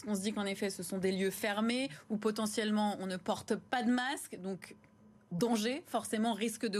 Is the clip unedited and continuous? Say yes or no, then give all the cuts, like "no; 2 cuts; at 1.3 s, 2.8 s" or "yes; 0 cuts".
yes; 0 cuts